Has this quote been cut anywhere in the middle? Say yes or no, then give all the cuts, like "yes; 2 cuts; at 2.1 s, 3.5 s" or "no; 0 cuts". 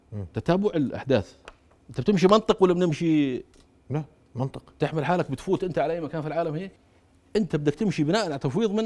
no; 0 cuts